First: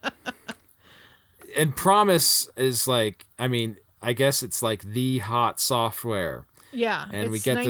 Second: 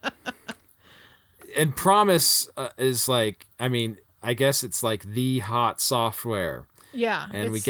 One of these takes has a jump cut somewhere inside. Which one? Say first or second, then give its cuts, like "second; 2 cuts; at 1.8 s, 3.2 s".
first; 1 cut; at 2.5 s